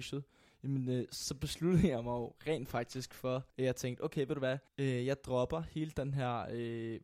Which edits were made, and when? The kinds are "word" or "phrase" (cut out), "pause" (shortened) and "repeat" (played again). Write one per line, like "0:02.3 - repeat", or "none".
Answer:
0:03.5 - pause
0:04.7 - pause

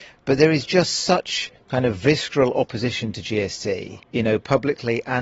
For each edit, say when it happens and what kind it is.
0:01.6 - pause
0:04.0 - pause

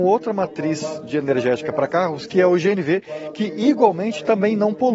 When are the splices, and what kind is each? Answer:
none

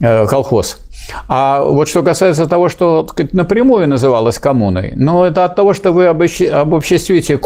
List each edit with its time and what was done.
none

